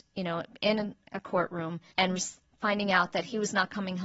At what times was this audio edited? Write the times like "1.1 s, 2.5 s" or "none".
1.9 s

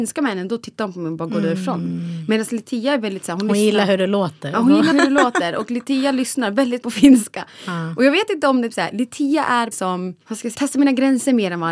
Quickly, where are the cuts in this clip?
4.9 s, 6.8 s, 8.7 s, 9.7 s, 10.2 s, 10.5 s

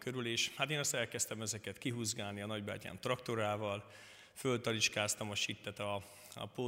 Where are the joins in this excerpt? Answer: none

